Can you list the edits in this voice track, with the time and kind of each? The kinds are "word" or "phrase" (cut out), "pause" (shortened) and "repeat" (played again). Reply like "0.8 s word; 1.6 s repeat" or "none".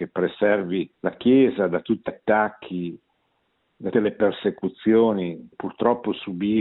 0.9 s pause; 2.1 s word; 3.9 s word; 5.5 s word